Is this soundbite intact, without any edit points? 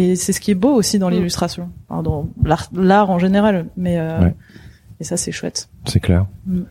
yes; 0 cuts

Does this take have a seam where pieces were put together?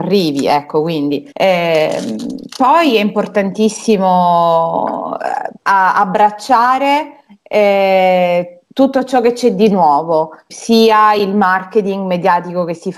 yes; 4 cuts; at 1.3 s, 5.6 s, 7.3 s, 10.5 s

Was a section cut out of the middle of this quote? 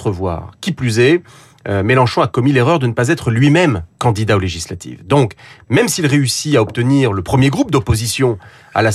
no; 0 cuts

